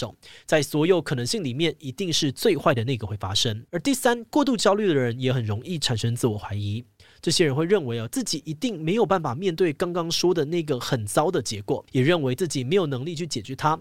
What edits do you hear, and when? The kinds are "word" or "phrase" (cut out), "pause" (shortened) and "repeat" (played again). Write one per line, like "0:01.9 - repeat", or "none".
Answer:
0:03.7 - pause
0:11.9 - pause